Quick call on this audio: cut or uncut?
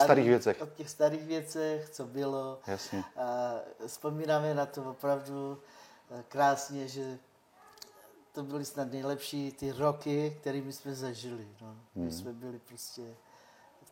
uncut